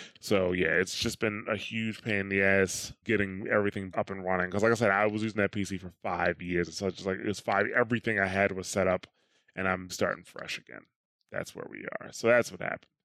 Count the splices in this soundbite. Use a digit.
4